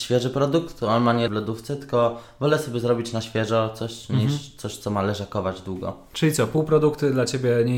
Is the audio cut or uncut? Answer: cut